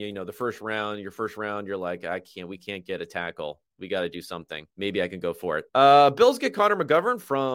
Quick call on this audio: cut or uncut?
cut